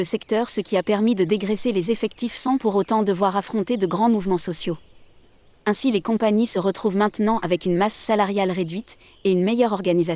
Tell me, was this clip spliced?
no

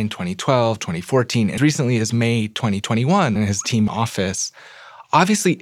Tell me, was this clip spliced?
yes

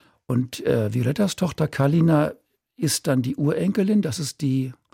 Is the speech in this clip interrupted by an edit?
no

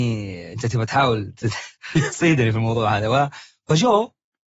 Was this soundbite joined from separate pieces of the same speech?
no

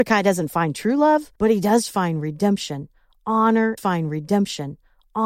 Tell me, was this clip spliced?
yes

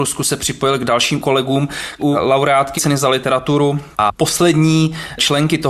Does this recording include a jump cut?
yes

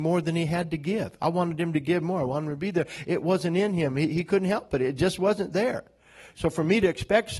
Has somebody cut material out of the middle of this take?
no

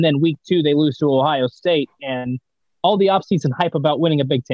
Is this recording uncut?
yes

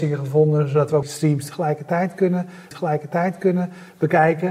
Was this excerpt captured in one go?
no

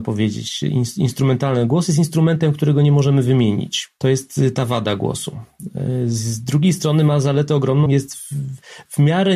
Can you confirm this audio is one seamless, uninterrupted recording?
no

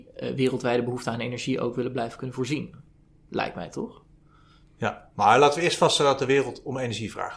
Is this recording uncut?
yes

